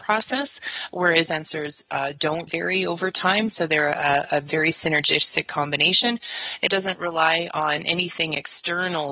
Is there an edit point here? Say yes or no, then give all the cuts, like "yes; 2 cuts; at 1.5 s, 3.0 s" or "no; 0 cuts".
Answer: yes; 3 cuts; at 1.3 s, 2.5 s, 6.7 s